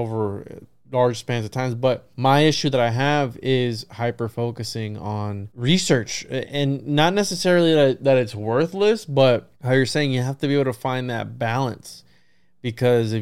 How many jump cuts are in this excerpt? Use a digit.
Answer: 3